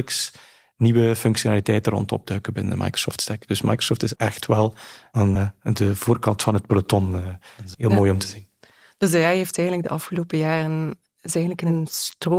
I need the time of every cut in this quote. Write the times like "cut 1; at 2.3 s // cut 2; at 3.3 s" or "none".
cut 1; at 4.2 s // cut 2; at 5.4 s // cut 3; at 7.7 s